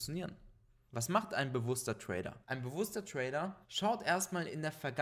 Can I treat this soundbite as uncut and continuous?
no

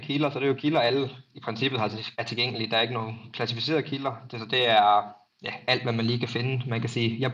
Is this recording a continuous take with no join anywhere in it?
no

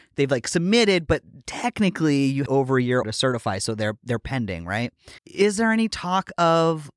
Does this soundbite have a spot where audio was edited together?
yes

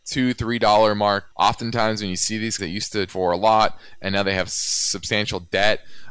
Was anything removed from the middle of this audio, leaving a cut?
yes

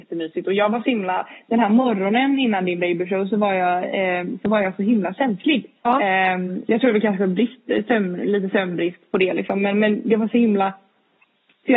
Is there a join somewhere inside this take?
yes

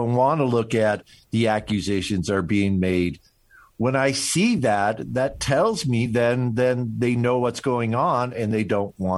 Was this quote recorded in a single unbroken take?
yes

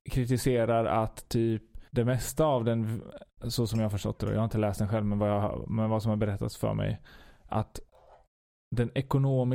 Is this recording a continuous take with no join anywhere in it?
no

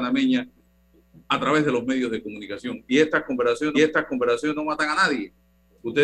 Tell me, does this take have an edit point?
yes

